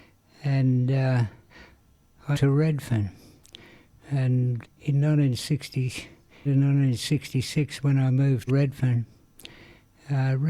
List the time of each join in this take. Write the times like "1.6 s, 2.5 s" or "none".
2.3 s, 4.6 s, 6.5 s, 8.5 s